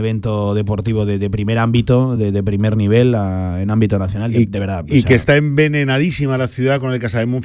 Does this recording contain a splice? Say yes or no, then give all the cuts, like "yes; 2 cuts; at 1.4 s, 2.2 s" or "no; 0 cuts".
no; 0 cuts